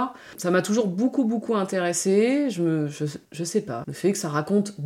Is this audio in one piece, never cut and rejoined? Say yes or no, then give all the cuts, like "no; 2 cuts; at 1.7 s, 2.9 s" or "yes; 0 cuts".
no; 2 cuts; at 3.2 s, 3.8 s